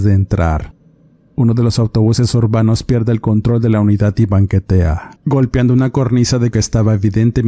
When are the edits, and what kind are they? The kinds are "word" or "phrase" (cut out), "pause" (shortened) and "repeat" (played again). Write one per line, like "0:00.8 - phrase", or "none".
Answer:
0:05.2 - pause
0:06.5 - word

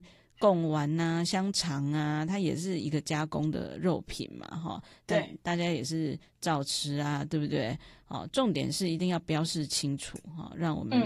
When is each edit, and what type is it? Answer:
none

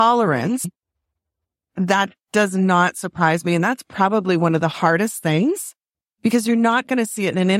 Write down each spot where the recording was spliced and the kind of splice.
none

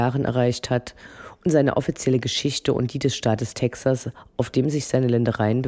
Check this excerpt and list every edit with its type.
none

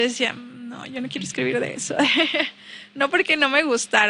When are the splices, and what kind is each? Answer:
none

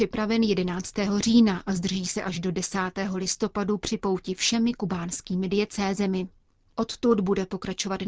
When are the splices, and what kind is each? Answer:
none

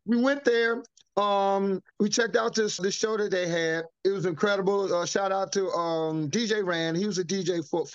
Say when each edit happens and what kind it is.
0:01.9 - pause
0:02.8 - word
0:03.9 - pause

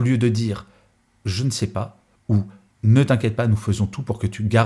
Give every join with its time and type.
none

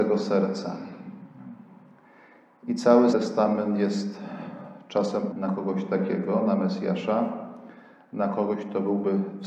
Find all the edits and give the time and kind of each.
0:03.1 - word
0:05.3 - word

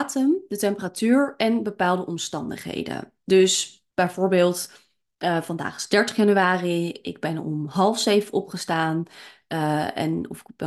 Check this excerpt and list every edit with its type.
0:03.9 - pause

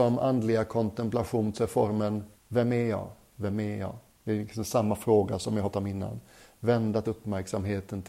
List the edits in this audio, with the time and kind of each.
0:01.5 - word
0:02.4 - pause
0:04.1 - pause
0:05.7 - word
0:07.0 - word

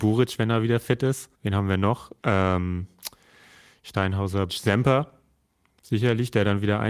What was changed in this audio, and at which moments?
0:01.3 - pause
0:02.2 - pause
0:04.5 - word

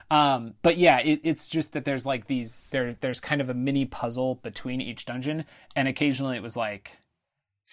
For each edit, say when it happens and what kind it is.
none

